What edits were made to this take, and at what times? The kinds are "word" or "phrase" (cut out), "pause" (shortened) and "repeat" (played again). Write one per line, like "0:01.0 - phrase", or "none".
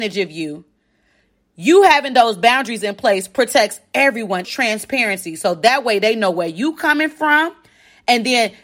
0:04.4 - phrase